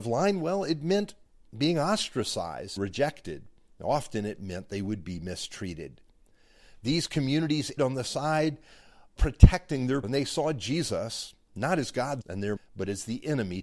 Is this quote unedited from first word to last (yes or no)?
no